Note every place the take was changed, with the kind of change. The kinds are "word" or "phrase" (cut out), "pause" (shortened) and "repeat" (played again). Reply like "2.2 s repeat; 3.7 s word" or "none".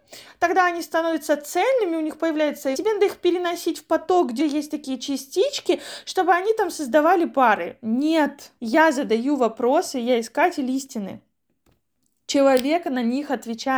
2.7 s phrase; 4.4 s word; 8.6 s pause